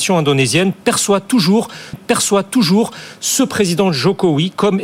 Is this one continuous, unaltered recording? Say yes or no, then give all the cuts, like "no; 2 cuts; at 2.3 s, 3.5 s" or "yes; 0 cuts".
no; 1 cut; at 1.9 s